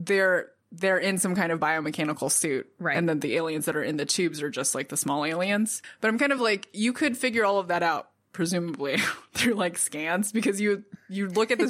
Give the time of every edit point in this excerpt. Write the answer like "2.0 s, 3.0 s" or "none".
none